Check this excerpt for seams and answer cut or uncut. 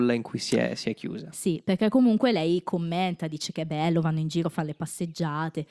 uncut